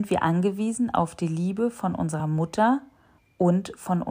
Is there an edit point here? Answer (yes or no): no